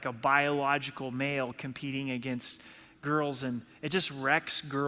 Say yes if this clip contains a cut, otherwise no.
no